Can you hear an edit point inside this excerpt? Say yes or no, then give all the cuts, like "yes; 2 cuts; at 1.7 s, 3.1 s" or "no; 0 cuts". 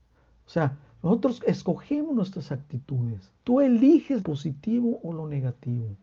yes; 2 cuts; at 3.4 s, 4.2 s